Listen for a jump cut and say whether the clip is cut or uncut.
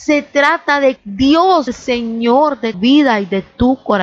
cut